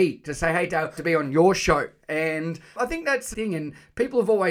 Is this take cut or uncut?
cut